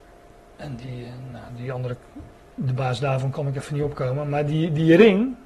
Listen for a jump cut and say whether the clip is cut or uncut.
uncut